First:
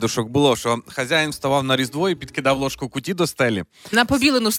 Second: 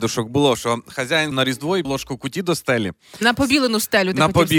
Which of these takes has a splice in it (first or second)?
second